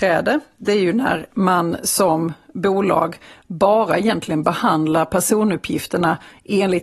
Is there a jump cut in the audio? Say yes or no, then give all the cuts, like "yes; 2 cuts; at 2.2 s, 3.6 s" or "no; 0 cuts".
no; 0 cuts